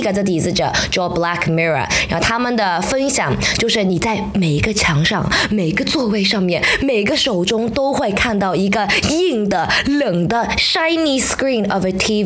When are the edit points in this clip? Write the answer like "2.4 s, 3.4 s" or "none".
none